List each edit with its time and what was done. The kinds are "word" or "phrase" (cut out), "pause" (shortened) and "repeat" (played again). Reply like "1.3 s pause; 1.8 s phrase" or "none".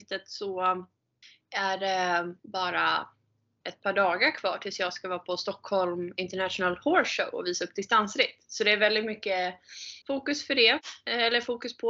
1.2 s pause; 2.4 s pause; 10.0 s pause